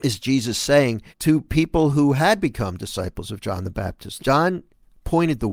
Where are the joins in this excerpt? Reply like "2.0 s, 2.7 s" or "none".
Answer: 1.1 s, 4.2 s

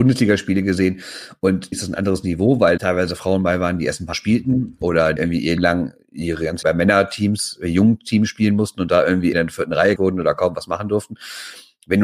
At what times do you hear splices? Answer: 1.7 s, 2.8 s, 4.1 s, 5.2 s, 5.6 s, 6.6 s, 9.3 s, 10.0 s

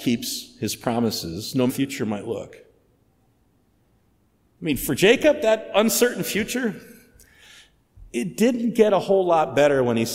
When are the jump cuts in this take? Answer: 1.7 s

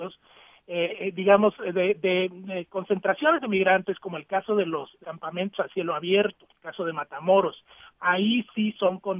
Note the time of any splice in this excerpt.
5.0 s, 6.5 s

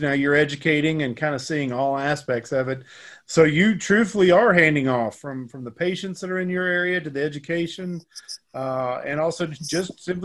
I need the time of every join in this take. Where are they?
none

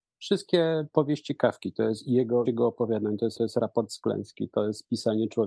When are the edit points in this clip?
2.4 s, 3.4 s

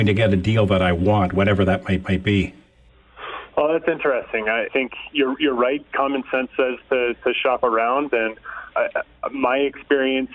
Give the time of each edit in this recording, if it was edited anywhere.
2.0 s, 4.7 s, 8.7 s

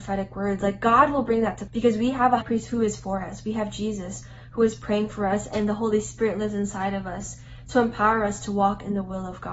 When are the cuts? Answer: 1.7 s, 2.4 s

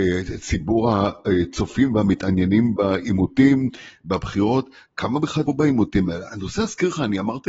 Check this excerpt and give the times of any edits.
5.5 s

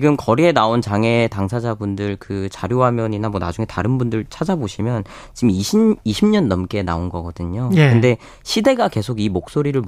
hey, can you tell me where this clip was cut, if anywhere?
none

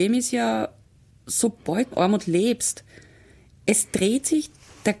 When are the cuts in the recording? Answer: 1.9 s

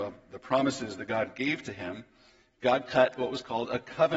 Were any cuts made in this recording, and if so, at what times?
none

